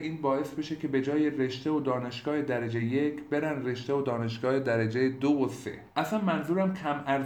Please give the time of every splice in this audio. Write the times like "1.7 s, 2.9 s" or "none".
none